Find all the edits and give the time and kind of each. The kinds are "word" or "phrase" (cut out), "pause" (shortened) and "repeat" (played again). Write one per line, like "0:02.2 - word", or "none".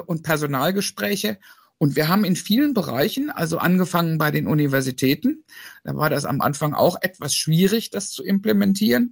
none